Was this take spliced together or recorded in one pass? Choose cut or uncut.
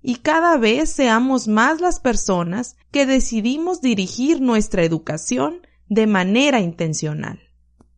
cut